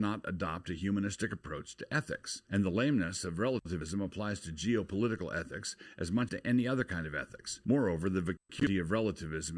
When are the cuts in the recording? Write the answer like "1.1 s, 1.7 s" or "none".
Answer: 6.3 s